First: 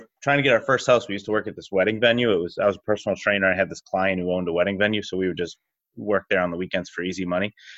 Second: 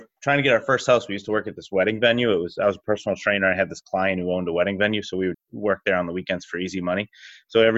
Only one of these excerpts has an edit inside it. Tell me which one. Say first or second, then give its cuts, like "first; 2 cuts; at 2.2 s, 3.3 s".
second; 1 cut; at 5.3 s